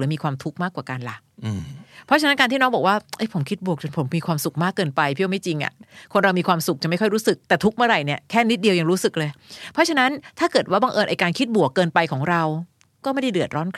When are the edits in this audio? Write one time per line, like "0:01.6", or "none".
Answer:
0:07.4